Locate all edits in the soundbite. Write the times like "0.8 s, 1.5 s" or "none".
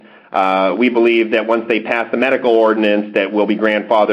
none